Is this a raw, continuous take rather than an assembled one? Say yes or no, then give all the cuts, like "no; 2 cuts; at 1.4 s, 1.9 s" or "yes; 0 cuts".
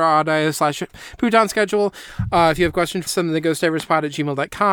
no; 1 cut; at 3.1 s